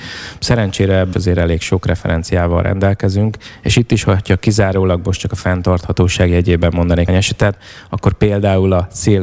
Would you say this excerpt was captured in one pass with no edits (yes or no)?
no